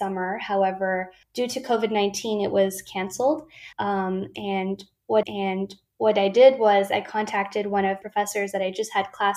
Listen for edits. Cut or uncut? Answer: cut